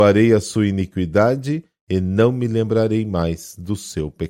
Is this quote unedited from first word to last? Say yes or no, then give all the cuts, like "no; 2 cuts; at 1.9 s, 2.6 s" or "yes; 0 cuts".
yes; 0 cuts